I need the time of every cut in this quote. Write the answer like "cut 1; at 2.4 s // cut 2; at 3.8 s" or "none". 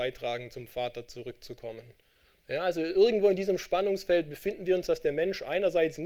none